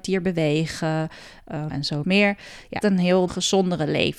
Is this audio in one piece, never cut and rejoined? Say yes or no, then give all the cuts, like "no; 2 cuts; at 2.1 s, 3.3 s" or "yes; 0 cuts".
no; 4 cuts; at 1.7 s, 2.0 s, 2.8 s, 3.3 s